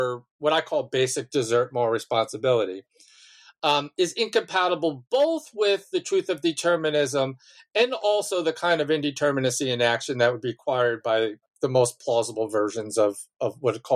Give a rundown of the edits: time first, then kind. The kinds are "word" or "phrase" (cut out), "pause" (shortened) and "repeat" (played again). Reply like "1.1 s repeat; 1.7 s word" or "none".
none